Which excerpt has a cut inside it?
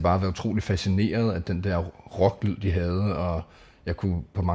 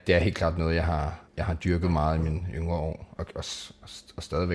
second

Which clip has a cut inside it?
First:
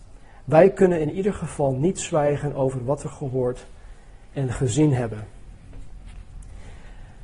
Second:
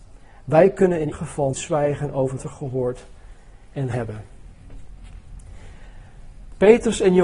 second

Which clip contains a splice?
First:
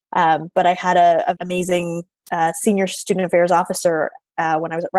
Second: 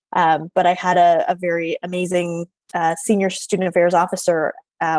first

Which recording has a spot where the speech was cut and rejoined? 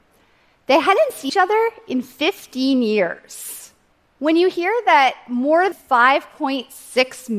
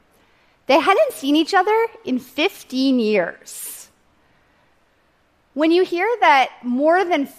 first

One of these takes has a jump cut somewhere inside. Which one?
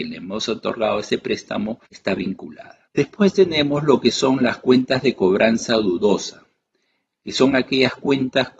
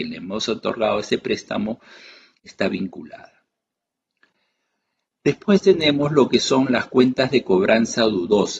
first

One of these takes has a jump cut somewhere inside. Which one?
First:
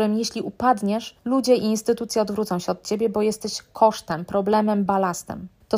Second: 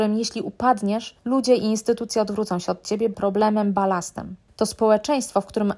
second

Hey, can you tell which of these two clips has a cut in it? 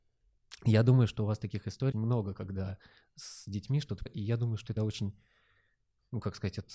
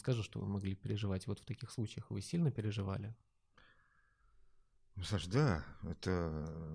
first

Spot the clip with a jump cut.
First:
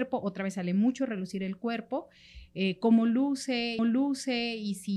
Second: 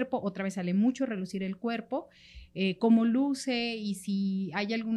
first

